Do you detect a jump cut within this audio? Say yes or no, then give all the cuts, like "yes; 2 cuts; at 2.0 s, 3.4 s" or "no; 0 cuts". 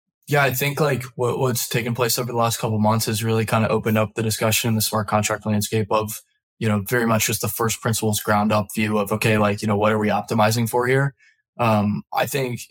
no; 0 cuts